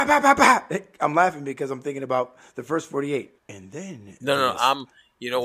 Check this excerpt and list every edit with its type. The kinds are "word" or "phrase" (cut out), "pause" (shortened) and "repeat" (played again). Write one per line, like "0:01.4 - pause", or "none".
0:03.4 - pause

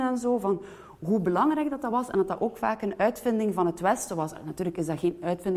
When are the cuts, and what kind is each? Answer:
none

